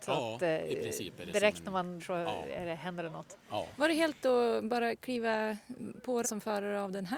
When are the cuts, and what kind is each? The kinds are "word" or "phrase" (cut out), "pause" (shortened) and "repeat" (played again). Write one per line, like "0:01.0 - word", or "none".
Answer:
0:02.0 - word
0:04.2 - word
0:06.2 - word